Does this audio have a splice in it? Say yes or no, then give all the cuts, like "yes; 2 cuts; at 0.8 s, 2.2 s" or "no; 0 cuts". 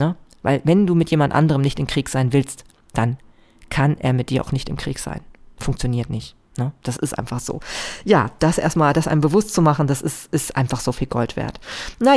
no; 0 cuts